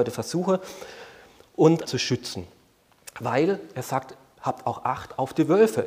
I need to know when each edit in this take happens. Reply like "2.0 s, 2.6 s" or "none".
1.9 s